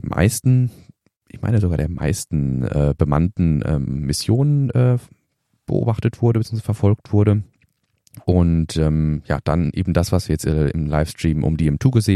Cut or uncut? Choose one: uncut